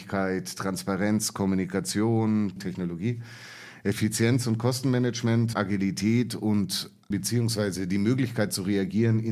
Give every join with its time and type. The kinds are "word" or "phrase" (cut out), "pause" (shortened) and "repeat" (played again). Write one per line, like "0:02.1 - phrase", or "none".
0:02.6 - word
0:05.5 - word
0:07.1 - word